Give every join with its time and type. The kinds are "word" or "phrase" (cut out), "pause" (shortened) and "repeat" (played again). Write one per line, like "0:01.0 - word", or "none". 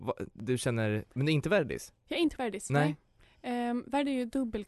0:02.4 - word